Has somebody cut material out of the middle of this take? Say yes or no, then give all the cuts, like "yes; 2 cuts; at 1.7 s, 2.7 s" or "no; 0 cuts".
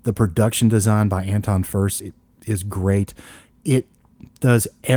yes; 1 cut; at 2.0 s